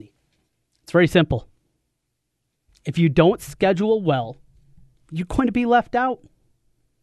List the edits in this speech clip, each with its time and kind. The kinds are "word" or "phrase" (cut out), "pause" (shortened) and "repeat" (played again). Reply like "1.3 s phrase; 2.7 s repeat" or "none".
none